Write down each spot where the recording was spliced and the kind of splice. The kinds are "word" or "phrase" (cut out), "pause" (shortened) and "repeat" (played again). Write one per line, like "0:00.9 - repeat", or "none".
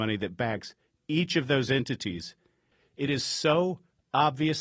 none